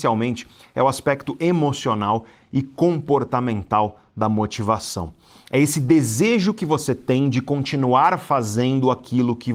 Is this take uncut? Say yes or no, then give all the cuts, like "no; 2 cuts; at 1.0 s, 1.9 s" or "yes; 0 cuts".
yes; 0 cuts